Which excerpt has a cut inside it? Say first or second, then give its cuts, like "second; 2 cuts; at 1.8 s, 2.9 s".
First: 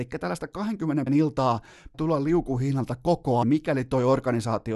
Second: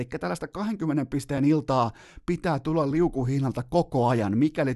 first; 3 cuts; at 1.1 s, 1.9 s, 3.4 s